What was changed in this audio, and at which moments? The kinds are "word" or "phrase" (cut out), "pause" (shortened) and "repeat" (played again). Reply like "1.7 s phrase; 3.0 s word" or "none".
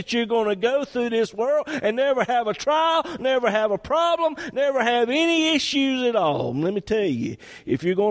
none